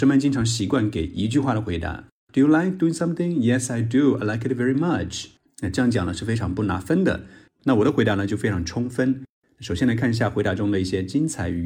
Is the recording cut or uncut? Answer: uncut